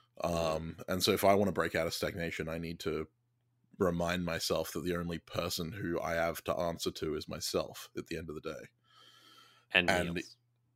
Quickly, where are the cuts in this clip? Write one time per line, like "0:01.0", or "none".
none